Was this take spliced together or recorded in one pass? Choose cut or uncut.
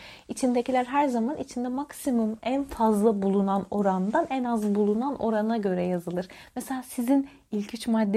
uncut